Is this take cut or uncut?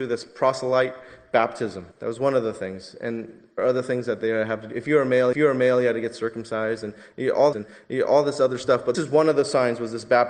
cut